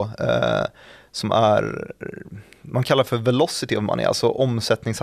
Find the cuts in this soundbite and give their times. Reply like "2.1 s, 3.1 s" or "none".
none